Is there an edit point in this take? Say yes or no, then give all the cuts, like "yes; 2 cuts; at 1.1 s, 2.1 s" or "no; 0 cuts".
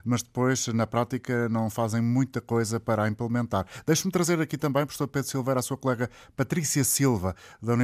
no; 0 cuts